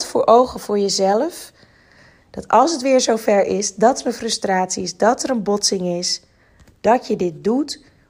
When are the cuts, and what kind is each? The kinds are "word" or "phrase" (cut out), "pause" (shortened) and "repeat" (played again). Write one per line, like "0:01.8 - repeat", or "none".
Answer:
none